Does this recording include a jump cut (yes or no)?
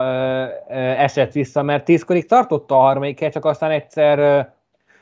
no